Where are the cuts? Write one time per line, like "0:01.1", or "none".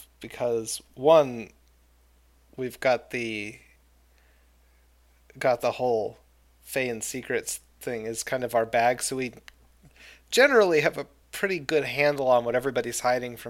none